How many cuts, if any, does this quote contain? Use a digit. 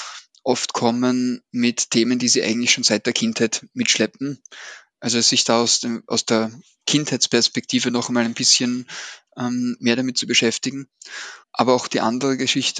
1